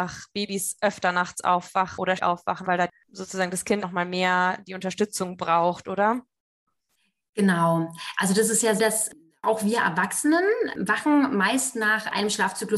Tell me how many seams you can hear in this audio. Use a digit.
4